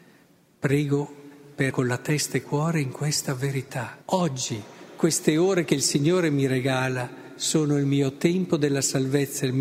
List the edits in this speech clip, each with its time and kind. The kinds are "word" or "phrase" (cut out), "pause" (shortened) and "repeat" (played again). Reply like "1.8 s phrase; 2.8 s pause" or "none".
1.7 s word; 2.4 s word; 4.0 s pause